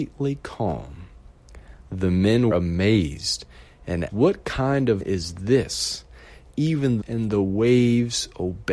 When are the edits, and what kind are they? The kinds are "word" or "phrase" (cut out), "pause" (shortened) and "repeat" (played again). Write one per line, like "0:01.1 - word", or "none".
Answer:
0:02.5 - word
0:04.1 - word
0:05.0 - word
0:07.0 - phrase